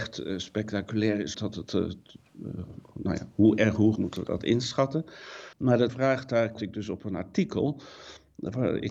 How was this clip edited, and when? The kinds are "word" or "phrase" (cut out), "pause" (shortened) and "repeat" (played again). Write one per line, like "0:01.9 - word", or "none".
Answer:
0:01.3 - word
0:04.0 - word
0:05.5 - pause
0:05.9 - word
0:06.6 - word